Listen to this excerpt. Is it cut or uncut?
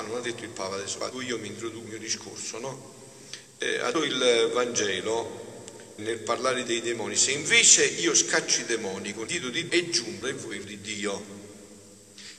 cut